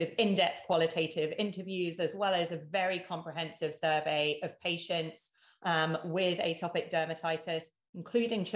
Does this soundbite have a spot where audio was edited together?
no; 0 cuts

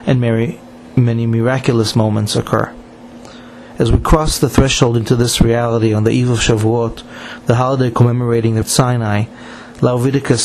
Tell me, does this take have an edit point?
yes; 1 cut; at 8.6 s

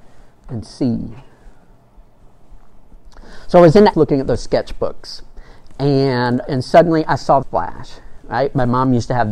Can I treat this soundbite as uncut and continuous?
no; 3 cuts; at 3.9 s, 6.4 s, 7.4 s

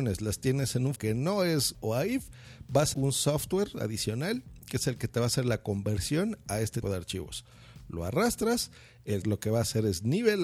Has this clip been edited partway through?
yes; 5 cuts; at 1.0 s, 1.7 s, 2.9 s, 6.8 s, 9.2 s

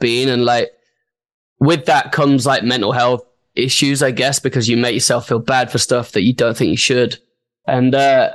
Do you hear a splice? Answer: no; 0 cuts

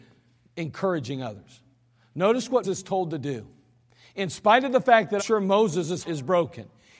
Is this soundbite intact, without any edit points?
no; 3 cuts; at 2.6 s, 5.2 s, 6.0 s

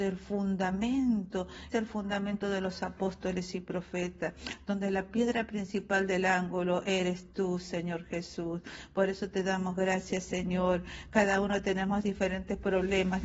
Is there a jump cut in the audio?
yes; 1 cut; at 1.7 s

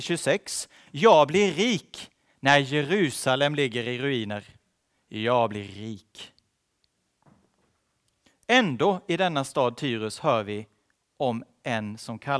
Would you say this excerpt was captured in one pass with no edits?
yes; 0 cuts

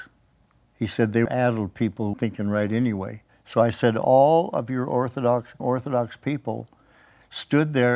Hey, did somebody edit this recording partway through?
yes; 4 cuts; at 1.3 s, 2.1 s, 3.3 s, 5.6 s

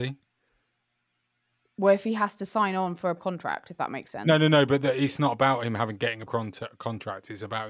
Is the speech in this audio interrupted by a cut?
yes; 2 cuts; at 3.2 s, 6.3 s

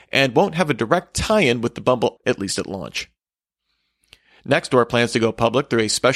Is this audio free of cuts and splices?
no; 1 cut; at 2.2 s

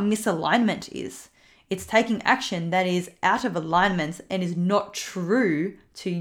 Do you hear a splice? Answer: no; 0 cuts

